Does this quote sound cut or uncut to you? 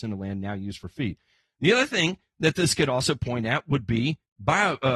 uncut